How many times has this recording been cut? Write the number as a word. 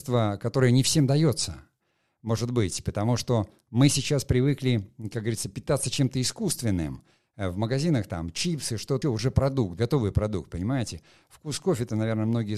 two